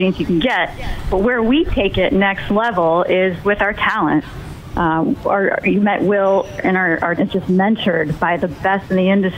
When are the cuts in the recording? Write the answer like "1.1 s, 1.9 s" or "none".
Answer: 6.6 s, 7.2 s

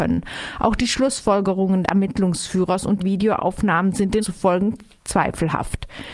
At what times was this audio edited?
1.8 s, 3.0 s, 4.2 s

